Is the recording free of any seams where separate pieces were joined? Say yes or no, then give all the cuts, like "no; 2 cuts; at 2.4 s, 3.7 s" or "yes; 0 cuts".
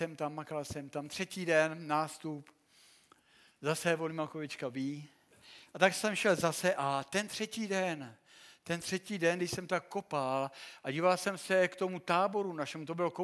yes; 0 cuts